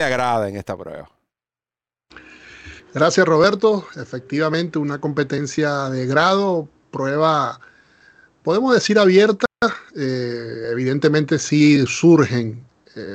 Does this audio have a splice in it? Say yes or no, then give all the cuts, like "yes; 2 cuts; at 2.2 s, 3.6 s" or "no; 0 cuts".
no; 0 cuts